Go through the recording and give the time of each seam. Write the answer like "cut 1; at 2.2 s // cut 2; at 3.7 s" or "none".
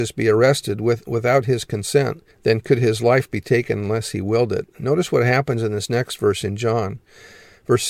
cut 1; at 2.3 s